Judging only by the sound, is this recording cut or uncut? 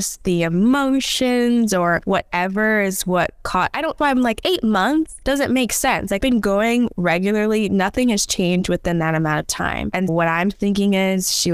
cut